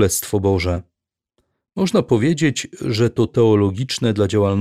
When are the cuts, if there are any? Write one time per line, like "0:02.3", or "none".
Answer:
0:03.3